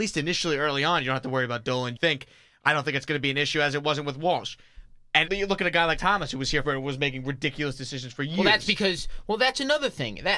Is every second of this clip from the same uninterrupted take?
no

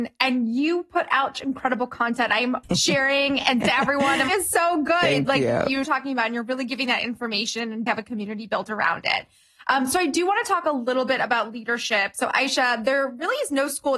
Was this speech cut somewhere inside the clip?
yes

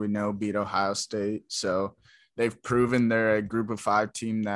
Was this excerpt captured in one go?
yes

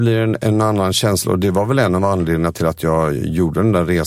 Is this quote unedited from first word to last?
yes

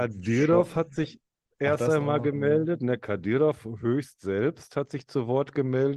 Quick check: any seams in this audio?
no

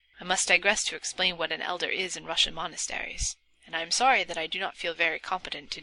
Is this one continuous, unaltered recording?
yes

